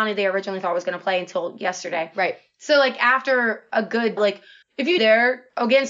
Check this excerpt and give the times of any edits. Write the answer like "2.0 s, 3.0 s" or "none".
4.2 s, 4.6 s, 5.0 s